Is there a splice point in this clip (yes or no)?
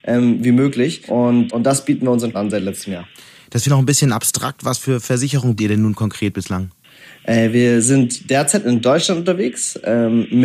yes